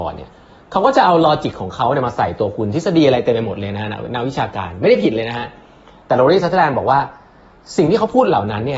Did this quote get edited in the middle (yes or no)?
no